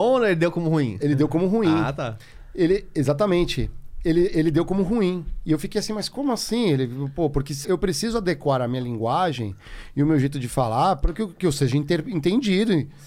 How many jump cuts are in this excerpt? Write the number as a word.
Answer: one